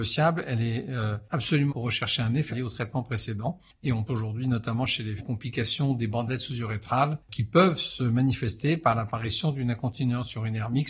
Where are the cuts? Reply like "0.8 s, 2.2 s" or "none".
1.7 s, 2.5 s, 4.1 s, 5.2 s